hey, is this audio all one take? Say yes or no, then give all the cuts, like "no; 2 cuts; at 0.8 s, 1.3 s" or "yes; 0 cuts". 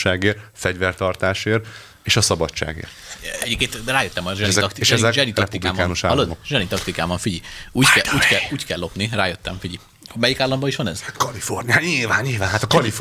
yes; 0 cuts